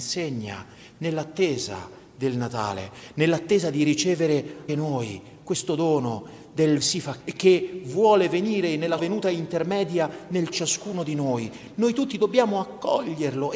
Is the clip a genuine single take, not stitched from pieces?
no; 5 cuts; at 4.7 s, 6.8 s, 7.2 s, 9.0 s, 10.5 s

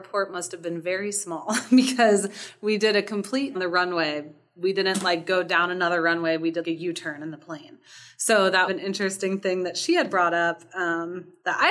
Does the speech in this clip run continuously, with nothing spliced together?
no; 3 cuts; at 3.5 s, 6.6 s, 8.7 s

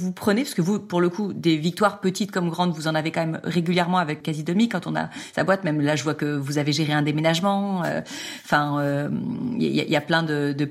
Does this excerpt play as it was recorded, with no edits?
no; 1 cut; at 4.2 s

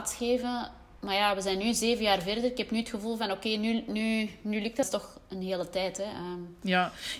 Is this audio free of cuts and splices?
no; 2 cuts; at 1.0 s, 4.8 s

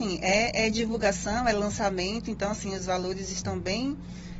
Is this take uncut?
yes; 0 cuts

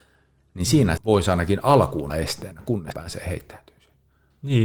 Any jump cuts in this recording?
yes; 3 cuts; at 1.0 s, 2.1 s, 2.9 s

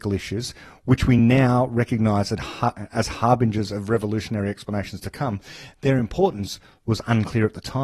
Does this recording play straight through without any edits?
yes; 0 cuts

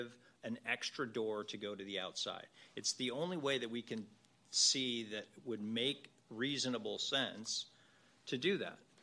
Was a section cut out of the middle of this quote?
no; 0 cuts

